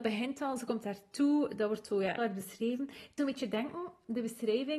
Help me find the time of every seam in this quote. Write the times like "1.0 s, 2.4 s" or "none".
2.2 s, 3.2 s